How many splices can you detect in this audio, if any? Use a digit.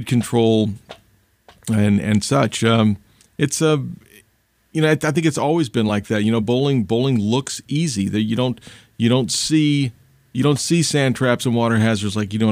0